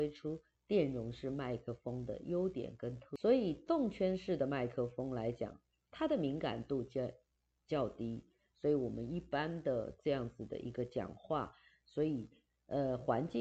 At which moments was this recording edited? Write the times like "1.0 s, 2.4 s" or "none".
none